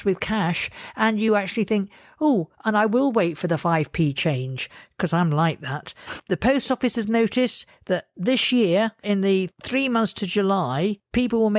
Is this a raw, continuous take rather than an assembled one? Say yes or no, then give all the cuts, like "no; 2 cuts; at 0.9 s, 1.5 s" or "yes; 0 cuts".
yes; 0 cuts